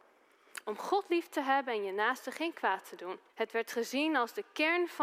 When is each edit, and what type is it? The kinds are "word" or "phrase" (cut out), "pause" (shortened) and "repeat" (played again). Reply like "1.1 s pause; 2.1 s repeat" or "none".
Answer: 3.3 s pause